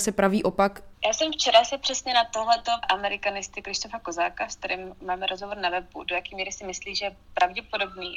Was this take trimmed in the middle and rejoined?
yes; 1 cut; at 2.8 s

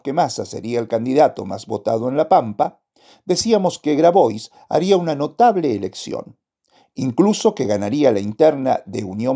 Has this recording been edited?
no; 0 cuts

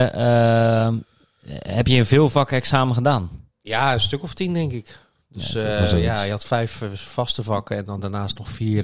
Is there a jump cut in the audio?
yes; 1 cut; at 3.5 s

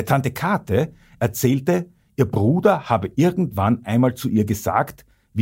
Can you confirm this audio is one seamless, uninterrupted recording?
yes; 0 cuts

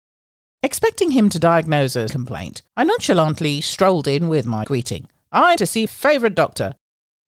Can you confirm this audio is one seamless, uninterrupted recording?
no; 5 cuts; at 2.1 s, 2.7 s, 4.6 s, 5.6 s, 5.9 s

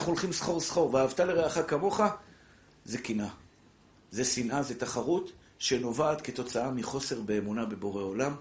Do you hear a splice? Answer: no; 0 cuts

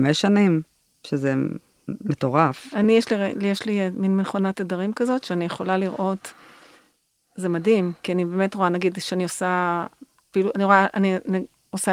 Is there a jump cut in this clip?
no; 0 cuts

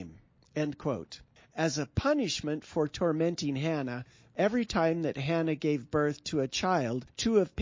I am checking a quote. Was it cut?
no; 0 cuts

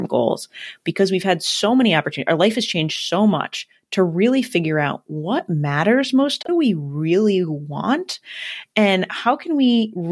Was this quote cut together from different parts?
yes; 1 cut; at 6.5 s

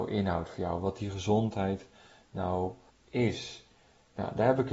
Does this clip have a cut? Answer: yes; 1 cut; at 2.9 s

